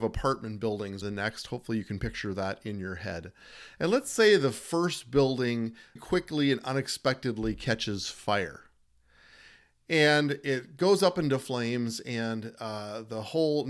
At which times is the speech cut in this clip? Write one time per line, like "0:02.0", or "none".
0:01.0
0:06.0